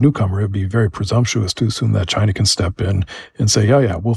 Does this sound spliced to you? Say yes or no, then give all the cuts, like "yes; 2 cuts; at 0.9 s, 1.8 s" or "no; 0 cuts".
no; 0 cuts